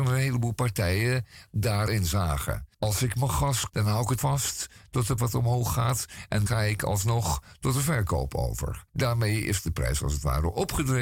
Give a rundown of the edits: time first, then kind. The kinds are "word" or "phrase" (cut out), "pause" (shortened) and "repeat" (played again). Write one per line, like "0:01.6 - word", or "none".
0:01.9 - word
0:02.7 - pause
0:03.7 - word
0:04.2 - word
0:05.2 - word
0:06.5 - word
0:08.9 - pause